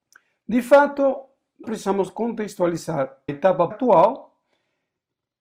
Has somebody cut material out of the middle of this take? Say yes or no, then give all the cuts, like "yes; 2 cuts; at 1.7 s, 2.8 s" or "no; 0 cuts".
yes; 3 cuts; at 1.6 s, 3.3 s, 3.7 s